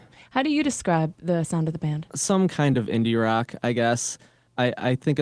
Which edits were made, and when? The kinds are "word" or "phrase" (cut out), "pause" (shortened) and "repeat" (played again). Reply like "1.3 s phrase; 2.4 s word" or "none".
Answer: none